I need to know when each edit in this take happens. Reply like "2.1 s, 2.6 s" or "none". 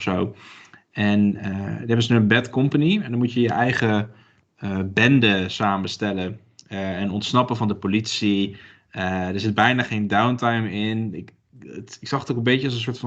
none